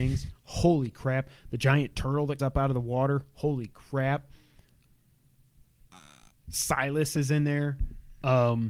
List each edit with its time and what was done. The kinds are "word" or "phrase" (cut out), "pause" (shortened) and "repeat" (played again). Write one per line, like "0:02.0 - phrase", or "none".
0:02.4 - word